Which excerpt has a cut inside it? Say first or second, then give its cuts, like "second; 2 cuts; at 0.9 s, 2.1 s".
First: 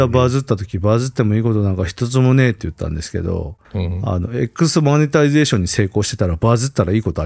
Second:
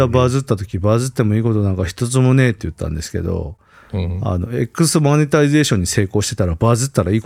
first; 1 cut; at 3.6 s